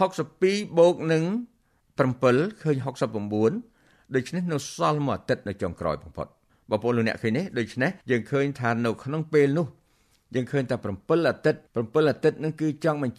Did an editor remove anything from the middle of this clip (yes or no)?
yes